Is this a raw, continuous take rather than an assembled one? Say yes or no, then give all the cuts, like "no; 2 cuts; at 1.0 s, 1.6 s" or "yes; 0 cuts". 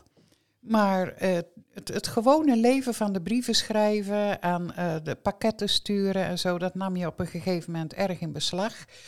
no; 1 cut; at 1.6 s